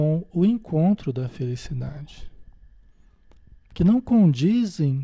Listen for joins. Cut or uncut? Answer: uncut